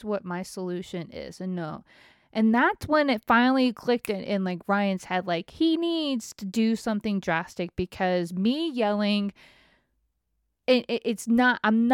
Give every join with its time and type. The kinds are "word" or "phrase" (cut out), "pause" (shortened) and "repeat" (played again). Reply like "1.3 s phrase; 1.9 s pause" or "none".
none